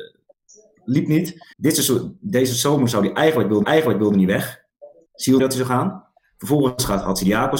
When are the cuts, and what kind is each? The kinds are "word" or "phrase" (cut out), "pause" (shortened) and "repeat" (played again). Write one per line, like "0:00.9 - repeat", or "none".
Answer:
0:01.5 - pause
0:03.6 - repeat
0:05.4 - phrase